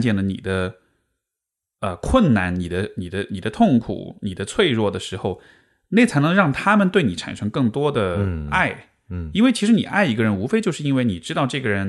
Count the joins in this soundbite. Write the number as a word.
zero